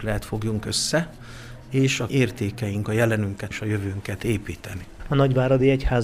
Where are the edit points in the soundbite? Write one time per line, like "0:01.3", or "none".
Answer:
0:02.1
0:02.8
0:03.5